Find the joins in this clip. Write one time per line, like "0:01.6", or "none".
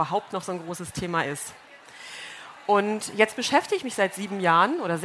none